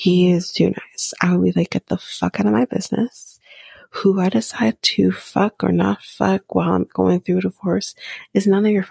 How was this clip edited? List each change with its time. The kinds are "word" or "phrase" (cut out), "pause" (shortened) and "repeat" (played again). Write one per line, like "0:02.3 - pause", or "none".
none